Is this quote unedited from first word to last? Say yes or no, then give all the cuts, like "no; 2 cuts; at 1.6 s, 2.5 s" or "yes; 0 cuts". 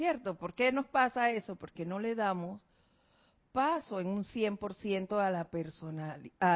yes; 0 cuts